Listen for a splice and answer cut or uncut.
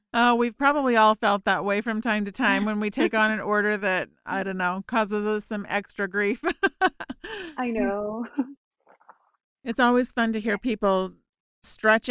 uncut